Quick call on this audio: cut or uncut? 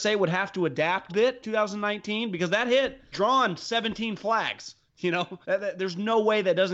cut